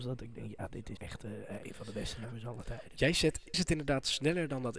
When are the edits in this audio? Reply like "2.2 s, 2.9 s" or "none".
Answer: 1.0 s, 3.5 s